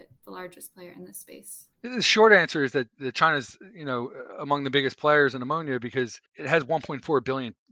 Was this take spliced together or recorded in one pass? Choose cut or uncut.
cut